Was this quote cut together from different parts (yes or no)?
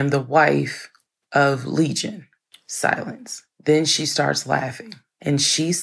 no